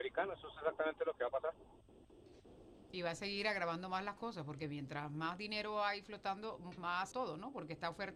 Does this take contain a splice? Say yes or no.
yes